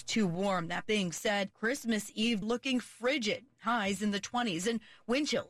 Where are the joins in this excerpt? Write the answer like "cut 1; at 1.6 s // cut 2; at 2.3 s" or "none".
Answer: cut 1; at 2.4 s